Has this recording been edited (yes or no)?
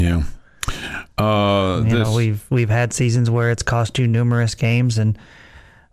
no